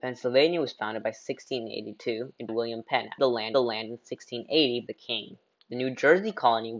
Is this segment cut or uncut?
cut